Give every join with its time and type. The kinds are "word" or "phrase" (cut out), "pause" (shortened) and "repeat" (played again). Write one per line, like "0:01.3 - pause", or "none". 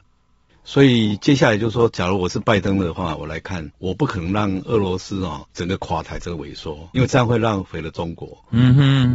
0:03.7 - pause
0:05.5 - pause
0:07.0 - word